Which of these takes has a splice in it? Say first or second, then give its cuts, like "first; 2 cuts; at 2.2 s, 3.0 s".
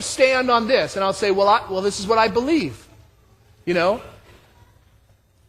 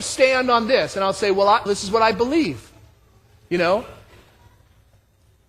second; 1 cut; at 1.7 s